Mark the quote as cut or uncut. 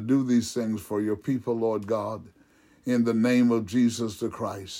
uncut